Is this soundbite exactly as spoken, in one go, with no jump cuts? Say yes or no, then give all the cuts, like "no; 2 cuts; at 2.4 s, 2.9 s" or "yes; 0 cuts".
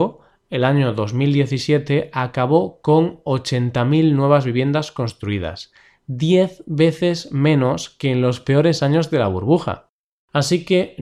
yes; 0 cuts